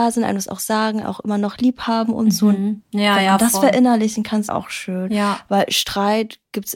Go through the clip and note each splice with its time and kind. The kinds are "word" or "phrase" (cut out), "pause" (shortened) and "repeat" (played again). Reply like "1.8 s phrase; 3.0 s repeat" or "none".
1.0 s word; 4.5 s word